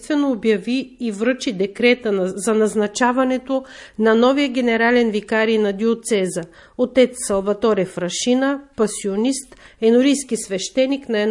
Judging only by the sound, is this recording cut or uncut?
uncut